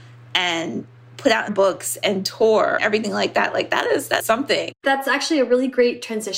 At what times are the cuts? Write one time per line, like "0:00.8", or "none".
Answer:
0:01.5
0:02.8
0:04.2
0:04.8